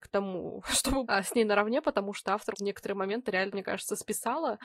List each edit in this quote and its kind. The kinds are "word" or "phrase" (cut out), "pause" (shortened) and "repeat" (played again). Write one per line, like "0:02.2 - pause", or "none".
0:01.0 - word
0:02.5 - word
0:03.5 - word